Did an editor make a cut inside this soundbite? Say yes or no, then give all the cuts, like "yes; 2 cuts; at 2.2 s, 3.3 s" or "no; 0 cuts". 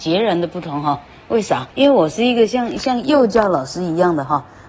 yes; 1 cut; at 1.7 s